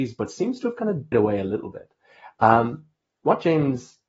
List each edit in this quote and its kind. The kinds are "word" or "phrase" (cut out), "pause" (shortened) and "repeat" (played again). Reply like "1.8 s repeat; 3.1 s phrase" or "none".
1.1 s word